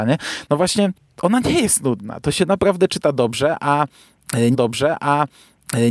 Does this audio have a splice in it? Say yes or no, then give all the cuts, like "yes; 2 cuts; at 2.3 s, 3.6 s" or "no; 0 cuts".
yes; 1 cut; at 4.5 s